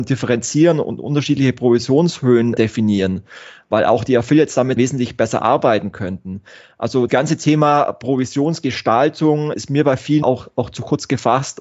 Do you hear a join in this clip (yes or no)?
yes